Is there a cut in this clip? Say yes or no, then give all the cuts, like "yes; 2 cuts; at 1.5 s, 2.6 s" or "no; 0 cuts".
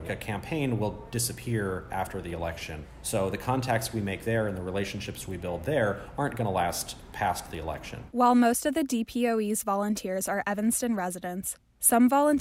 no; 0 cuts